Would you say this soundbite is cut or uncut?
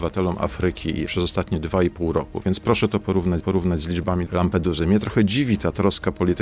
cut